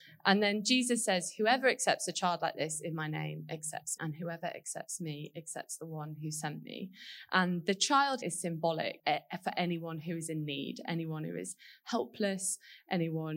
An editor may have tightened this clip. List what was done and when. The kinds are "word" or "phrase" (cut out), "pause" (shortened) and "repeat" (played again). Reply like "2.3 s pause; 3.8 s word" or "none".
4.0 s word; 8.2 s word; 9.0 s word